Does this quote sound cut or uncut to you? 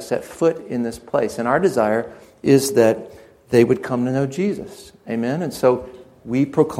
uncut